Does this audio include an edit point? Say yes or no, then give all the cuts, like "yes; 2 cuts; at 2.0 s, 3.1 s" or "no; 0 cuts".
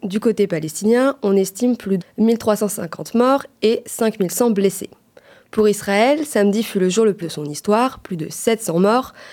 yes; 2 cuts; at 2.0 s, 7.2 s